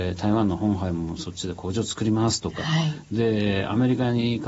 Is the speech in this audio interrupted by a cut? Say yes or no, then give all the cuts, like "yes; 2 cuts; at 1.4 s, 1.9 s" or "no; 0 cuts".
no; 0 cuts